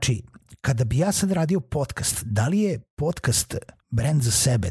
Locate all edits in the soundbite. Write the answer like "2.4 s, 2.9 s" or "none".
none